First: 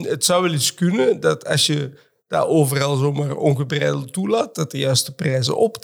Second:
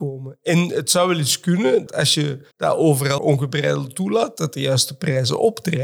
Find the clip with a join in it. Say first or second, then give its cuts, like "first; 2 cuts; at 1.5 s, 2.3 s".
second; 3 cuts; at 1.9 s, 2.5 s, 3.2 s